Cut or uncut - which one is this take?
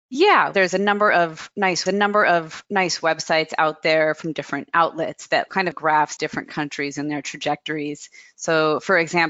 cut